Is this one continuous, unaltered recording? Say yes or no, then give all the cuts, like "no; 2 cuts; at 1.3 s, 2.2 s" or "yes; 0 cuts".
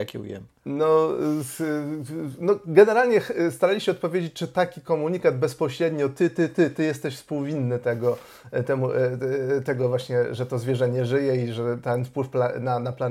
yes; 0 cuts